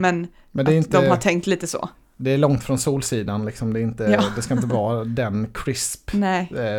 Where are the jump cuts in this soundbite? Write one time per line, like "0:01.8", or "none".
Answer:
none